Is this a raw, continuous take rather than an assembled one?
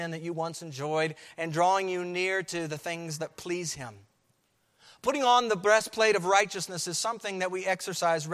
no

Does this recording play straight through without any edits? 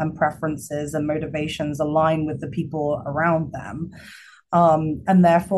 yes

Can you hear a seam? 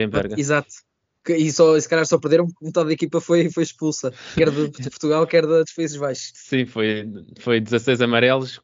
no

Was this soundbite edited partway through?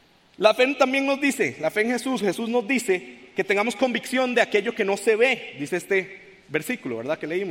yes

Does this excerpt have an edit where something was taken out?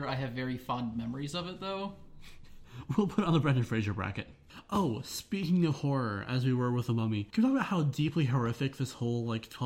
no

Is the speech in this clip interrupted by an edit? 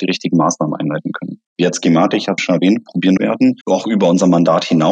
yes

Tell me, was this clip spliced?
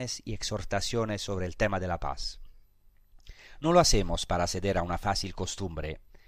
no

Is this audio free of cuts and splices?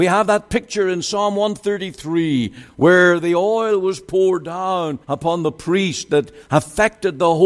no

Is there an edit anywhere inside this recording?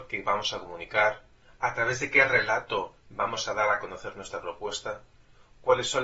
no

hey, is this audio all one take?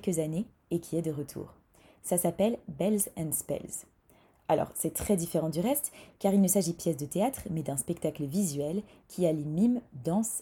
no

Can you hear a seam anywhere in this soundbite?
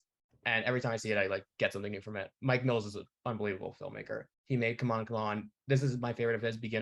yes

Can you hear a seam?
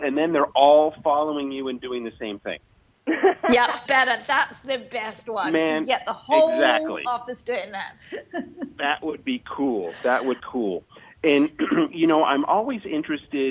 yes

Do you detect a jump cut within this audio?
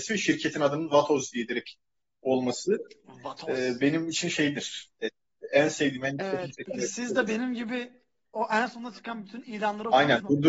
no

